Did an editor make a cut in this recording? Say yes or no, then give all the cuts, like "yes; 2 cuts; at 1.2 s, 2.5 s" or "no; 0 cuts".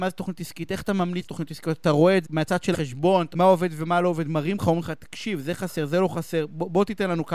yes; 4 cuts; at 1.2 s, 2.2 s, 2.7 s, 3.3 s